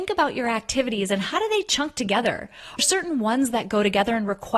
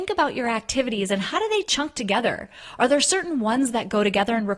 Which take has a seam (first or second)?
first